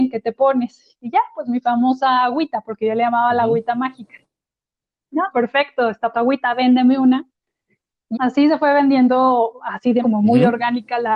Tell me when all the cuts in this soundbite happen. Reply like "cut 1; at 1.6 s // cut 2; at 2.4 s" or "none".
cut 1; at 5.3 s // cut 2; at 6.1 s // cut 3; at 8.1 s // cut 4; at 10.0 s